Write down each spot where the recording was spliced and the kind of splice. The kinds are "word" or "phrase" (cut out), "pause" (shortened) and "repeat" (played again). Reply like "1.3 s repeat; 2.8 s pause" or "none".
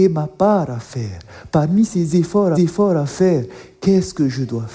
2.5 s repeat